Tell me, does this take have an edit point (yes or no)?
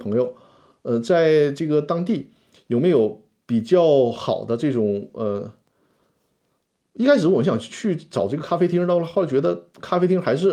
no